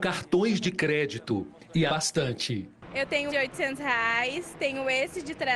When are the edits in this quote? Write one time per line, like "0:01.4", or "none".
0:01.9
0:03.3